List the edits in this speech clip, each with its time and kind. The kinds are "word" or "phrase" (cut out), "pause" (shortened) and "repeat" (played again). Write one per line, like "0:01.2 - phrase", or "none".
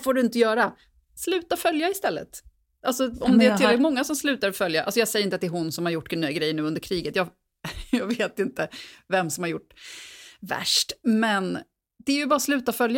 none